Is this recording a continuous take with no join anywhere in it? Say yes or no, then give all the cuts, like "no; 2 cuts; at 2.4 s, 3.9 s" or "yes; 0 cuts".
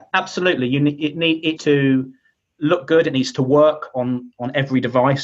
no; 1 cut; at 1.6 s